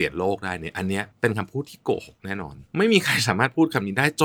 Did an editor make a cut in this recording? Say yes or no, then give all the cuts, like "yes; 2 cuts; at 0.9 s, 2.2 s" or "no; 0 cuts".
yes; 2 cuts; at 1.1 s, 2.7 s